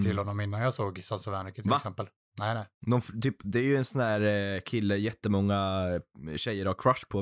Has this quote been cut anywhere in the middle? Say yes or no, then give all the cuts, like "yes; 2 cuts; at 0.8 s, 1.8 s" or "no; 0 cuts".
no; 0 cuts